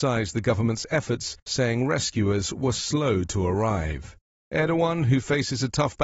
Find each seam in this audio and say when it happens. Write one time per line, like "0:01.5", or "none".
0:01.4